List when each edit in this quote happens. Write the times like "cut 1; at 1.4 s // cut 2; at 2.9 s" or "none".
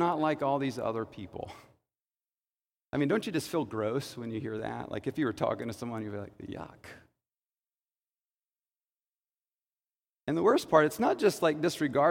none